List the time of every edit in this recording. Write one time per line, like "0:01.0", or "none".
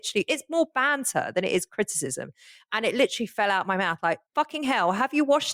0:04.3